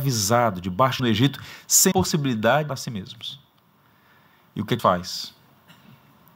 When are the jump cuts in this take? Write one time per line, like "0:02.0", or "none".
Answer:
0:01.0
0:01.9
0:02.7
0:04.8